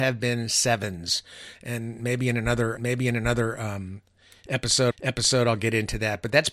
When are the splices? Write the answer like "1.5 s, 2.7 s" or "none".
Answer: 2.8 s, 4.9 s